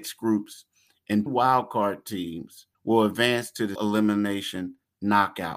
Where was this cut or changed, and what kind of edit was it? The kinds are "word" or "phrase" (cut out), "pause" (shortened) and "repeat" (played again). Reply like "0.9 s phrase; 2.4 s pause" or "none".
1.3 s word; 2.7 s pause; 3.8 s word